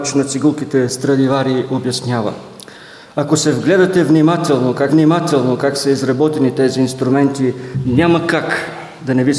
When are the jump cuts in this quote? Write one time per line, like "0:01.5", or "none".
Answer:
0:04.9